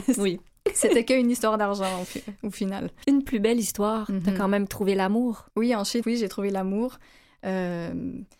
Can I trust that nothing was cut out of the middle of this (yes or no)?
no